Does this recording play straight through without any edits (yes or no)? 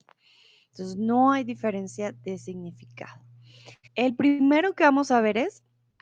no